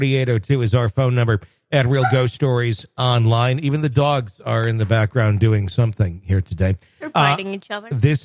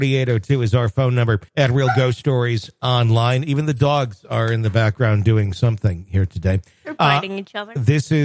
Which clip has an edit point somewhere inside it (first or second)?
second